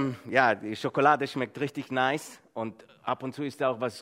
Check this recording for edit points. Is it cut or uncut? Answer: uncut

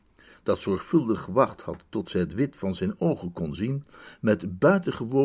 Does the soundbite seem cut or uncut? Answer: uncut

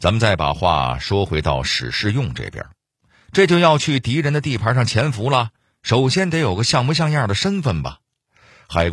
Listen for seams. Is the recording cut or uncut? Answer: uncut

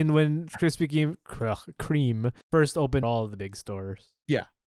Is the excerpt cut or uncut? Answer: cut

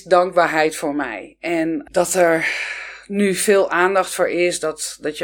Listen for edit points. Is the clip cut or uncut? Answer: uncut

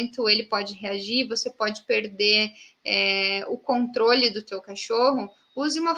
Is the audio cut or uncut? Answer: uncut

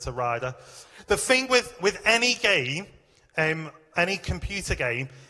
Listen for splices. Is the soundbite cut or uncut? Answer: uncut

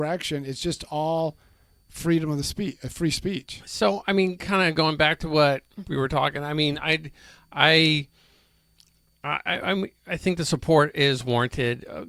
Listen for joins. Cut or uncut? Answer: uncut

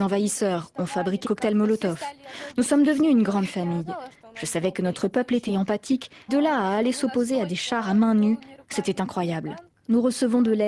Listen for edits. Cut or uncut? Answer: cut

